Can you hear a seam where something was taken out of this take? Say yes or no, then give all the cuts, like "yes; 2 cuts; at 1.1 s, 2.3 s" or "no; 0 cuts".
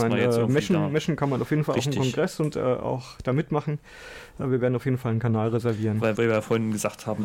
yes; 1 cut; at 6.1 s